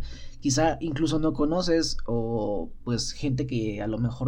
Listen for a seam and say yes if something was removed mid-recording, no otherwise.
no